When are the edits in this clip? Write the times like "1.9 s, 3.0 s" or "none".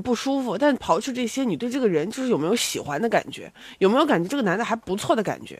none